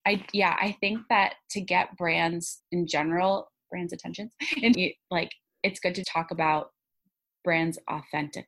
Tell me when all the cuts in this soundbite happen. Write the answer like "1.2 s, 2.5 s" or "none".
2.6 s, 4.7 s, 6.0 s